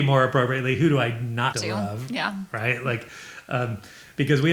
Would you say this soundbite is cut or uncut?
cut